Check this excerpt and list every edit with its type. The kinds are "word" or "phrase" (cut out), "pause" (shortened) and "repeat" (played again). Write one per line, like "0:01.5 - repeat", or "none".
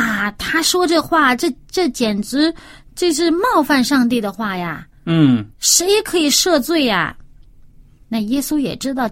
0:05.5 - pause